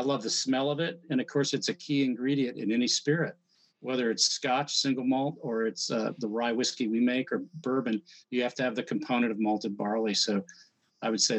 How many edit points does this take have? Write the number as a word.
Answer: zero